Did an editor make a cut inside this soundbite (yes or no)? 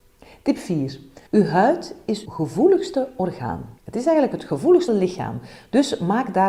yes